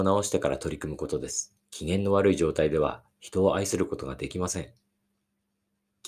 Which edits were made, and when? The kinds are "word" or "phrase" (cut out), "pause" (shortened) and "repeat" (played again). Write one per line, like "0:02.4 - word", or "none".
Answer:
0:01.6 - pause